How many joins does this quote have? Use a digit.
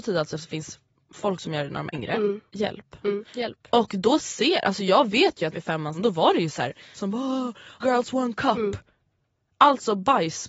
6